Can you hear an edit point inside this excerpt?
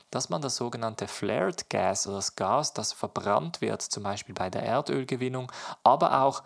yes; 1 cut; at 2.1 s

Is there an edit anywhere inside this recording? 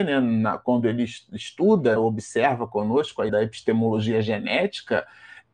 yes; 2 cuts; at 2.0 s, 3.3 s

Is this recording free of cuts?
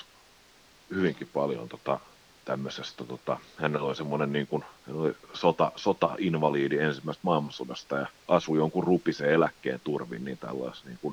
no; 3 cuts; at 2.3 s, 4.8 s, 8.2 s

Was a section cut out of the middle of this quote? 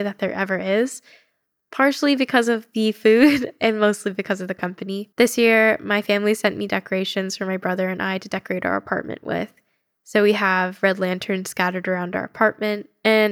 yes; 1 cut; at 5.1 s

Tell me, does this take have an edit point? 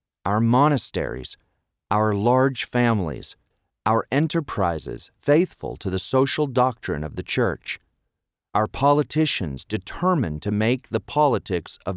no; 0 cuts

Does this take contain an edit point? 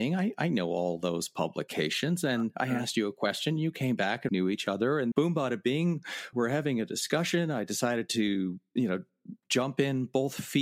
yes; 3 cuts; at 4.3 s, 5.1 s, 6.3 s

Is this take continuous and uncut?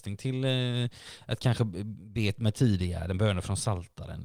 yes; 0 cuts

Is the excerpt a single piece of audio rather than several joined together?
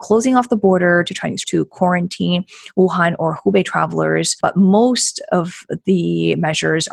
no; 1 cut; at 1.4 s

